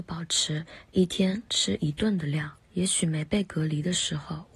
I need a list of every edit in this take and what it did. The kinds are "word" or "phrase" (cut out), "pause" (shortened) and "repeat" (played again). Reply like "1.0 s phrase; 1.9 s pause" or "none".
2.6 s pause